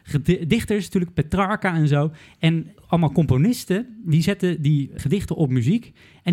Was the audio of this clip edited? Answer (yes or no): yes